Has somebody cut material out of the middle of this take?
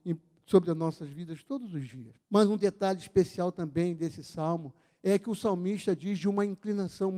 yes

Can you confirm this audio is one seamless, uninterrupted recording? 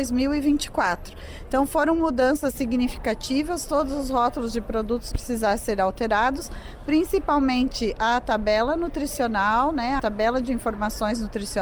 no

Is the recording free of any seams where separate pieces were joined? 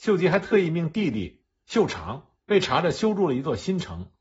no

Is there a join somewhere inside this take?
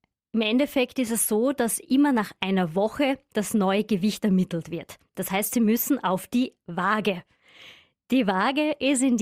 no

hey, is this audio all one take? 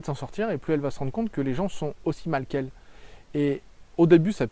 yes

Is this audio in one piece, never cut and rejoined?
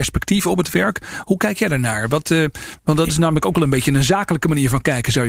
yes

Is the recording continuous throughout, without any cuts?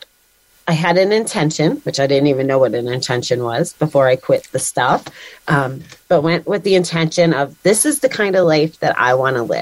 yes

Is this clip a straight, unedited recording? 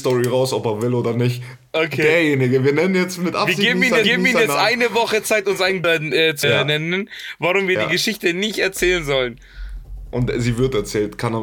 no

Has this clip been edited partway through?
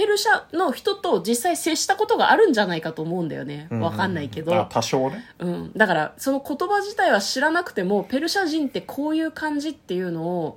no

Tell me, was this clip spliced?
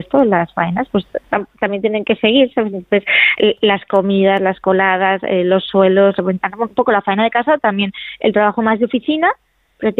no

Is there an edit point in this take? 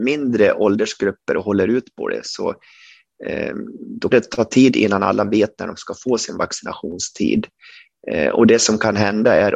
yes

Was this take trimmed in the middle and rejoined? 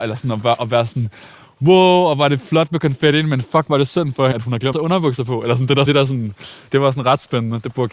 yes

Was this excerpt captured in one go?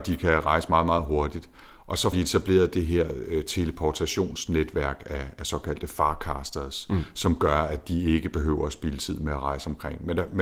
no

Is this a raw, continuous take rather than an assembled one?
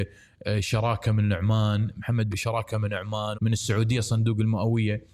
no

